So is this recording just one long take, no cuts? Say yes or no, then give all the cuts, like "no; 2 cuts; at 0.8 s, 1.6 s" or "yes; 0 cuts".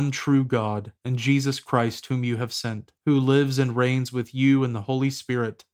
no; 2 cuts; at 1.0 s, 3.0 s